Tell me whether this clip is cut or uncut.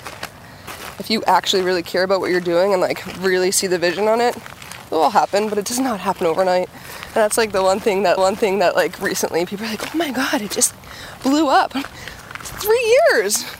cut